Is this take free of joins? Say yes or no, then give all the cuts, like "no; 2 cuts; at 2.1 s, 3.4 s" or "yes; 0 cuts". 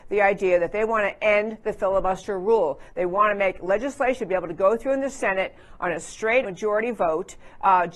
no; 1 cut; at 6.4 s